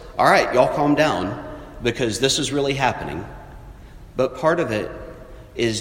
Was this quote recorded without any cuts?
yes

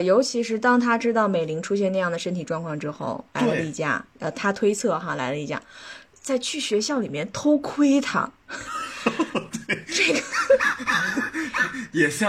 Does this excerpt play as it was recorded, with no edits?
no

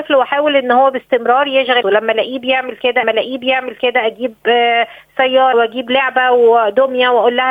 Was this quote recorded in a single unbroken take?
no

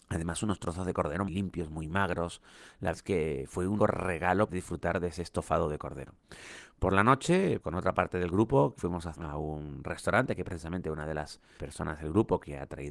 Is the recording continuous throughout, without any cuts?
no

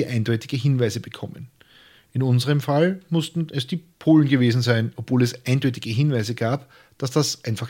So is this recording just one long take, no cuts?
yes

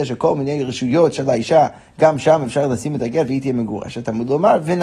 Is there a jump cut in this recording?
no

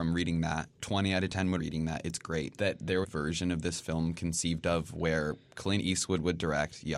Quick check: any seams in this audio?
yes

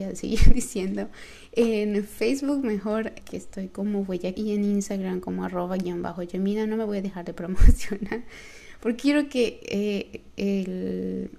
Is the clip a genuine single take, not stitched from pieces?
no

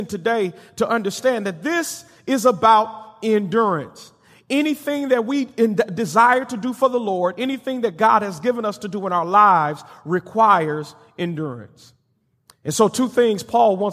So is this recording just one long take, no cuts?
yes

